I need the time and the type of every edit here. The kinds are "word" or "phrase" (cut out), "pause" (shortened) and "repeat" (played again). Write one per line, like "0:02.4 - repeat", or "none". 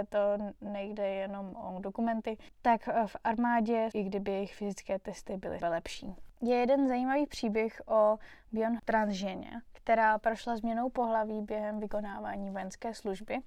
0:03.9 - phrase
0:05.6 - word
0:08.8 - word